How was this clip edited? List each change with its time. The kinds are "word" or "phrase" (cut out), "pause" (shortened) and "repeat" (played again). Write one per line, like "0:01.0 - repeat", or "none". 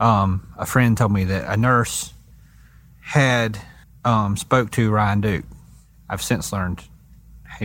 0:03.8 - pause